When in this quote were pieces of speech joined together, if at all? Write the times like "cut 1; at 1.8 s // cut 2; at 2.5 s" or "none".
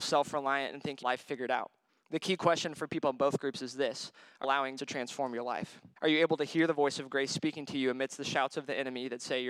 cut 1; at 1.0 s // cut 2; at 1.9 s // cut 3; at 4.4 s // cut 4; at 4.8 s // cut 5; at 6.0 s